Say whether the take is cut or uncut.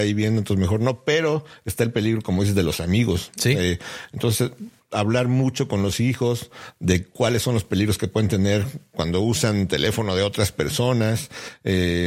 uncut